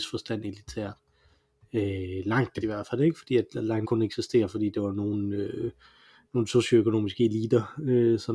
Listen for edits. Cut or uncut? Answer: cut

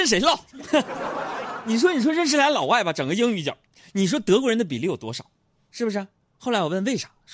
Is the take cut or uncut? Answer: cut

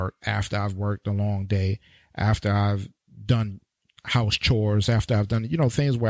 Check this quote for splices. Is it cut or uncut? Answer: uncut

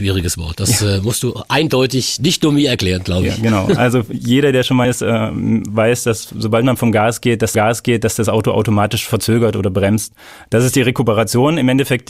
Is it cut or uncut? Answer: cut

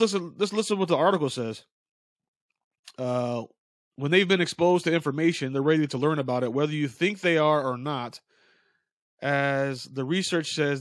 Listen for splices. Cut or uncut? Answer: uncut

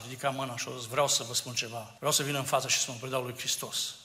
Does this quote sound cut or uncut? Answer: cut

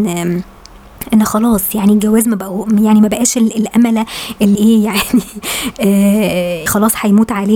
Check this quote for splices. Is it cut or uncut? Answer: cut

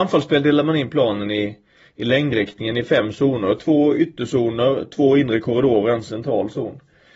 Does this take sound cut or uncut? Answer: uncut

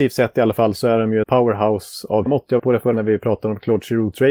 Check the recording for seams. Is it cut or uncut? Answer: cut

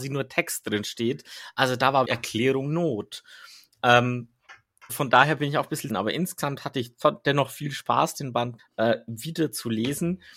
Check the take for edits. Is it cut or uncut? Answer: cut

